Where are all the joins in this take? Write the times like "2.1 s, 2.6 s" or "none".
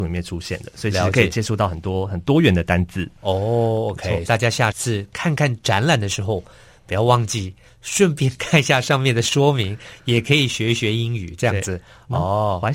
4.2 s